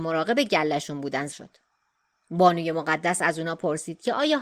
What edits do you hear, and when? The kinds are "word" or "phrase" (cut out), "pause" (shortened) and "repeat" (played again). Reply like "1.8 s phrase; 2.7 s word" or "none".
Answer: 1.3 s word